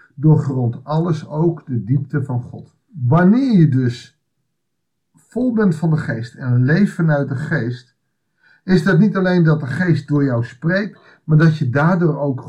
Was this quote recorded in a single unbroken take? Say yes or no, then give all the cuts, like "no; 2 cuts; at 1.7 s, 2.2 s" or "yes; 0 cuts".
no; 1 cut; at 2.8 s